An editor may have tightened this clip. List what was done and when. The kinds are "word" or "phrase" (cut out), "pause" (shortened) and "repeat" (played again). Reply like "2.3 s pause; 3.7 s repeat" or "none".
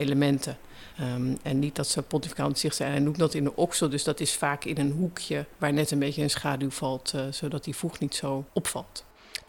0.9 s pause; 5.5 s pause; 8.5 s pause